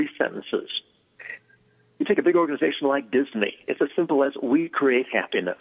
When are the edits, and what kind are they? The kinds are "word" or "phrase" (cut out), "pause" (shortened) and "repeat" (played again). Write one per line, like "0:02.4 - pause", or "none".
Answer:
none